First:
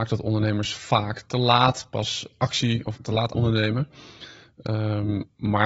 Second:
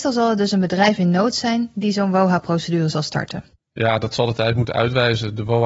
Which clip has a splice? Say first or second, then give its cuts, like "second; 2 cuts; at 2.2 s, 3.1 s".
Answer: first; 2 cuts; at 3.0 s, 3.3 s